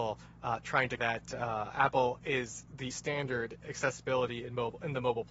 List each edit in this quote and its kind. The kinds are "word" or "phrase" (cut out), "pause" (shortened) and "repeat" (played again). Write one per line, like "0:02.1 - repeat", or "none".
0:01.0 - word
0:02.9 - word
0:03.6 - word